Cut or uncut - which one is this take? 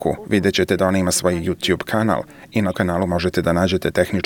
cut